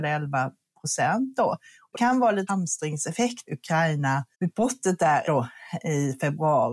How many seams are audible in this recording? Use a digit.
5